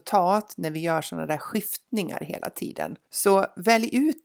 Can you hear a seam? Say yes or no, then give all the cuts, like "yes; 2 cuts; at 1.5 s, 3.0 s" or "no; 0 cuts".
yes; 1 cut; at 3.0 s